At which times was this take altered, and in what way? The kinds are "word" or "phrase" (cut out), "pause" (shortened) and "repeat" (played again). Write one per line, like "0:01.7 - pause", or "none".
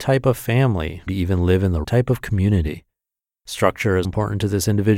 0:01.1 - word
0:01.8 - word
0:04.0 - word